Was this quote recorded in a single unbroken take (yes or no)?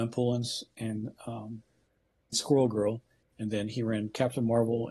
no